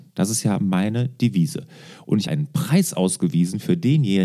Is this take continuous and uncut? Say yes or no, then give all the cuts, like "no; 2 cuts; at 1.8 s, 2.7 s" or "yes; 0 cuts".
no; 1 cut; at 2.2 s